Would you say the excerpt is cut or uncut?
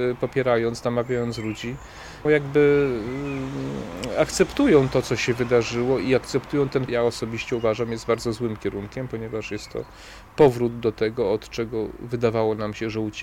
cut